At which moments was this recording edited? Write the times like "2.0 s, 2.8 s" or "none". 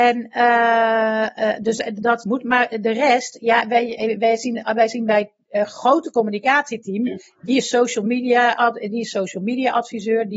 1.9 s